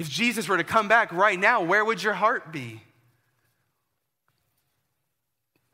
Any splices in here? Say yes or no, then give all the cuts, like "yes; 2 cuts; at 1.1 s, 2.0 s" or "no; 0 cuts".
no; 0 cuts